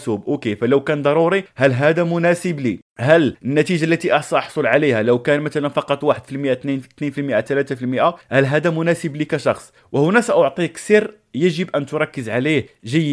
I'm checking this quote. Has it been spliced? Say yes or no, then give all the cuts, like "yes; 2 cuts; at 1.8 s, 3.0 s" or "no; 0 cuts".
yes; 1 cut; at 2.9 s